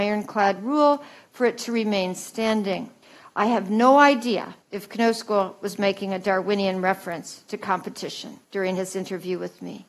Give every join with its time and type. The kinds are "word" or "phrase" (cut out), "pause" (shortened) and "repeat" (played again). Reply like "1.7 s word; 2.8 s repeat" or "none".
3.0 s pause; 4.6 s pause; 8.4 s pause

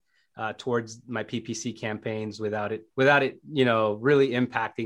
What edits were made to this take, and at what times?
2.9 s pause

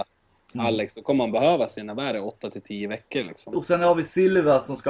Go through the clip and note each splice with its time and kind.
none

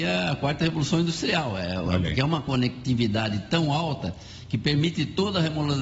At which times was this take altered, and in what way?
none

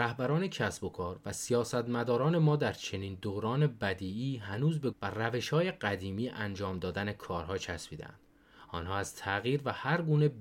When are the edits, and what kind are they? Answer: 4.9 s word

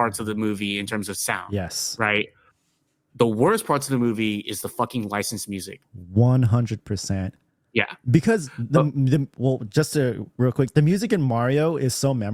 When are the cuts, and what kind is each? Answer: none

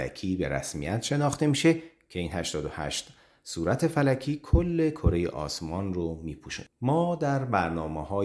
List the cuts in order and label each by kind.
none

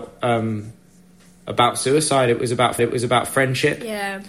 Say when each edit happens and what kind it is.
2.8 s repeat

